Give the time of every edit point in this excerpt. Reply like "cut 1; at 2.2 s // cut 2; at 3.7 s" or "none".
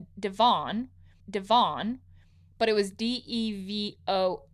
cut 1; at 1.2 s